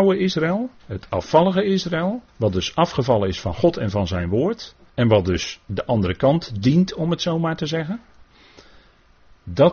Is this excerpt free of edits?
no; 2 cuts; at 2.3 s, 4.9 s

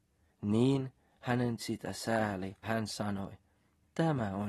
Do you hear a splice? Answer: yes; 2 cuts; at 1.6 s, 2.6 s

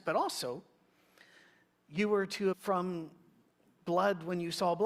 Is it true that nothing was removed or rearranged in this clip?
no; 1 cut; at 2.5 s

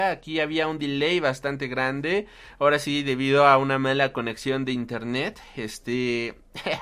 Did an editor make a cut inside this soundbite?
no; 0 cuts

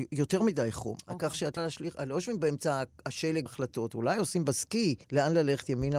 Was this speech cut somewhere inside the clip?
yes; 3 cuts; at 1.6 s, 3.5 s, 5.0 s

